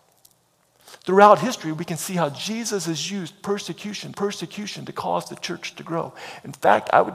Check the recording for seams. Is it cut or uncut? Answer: cut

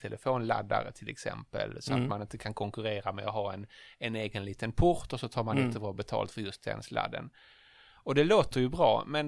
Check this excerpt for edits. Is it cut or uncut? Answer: uncut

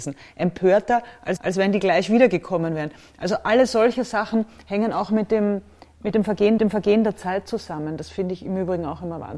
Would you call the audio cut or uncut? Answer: cut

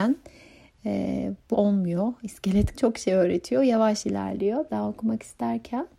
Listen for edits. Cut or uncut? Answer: cut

